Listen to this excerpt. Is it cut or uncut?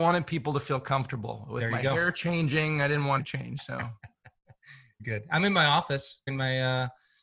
cut